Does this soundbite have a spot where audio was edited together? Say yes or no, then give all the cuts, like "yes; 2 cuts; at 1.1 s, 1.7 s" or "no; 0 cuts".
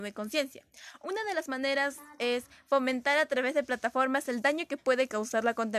no; 0 cuts